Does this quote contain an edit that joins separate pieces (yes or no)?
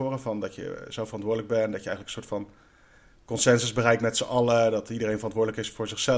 no